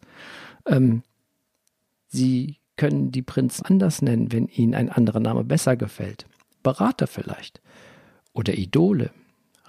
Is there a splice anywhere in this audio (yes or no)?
yes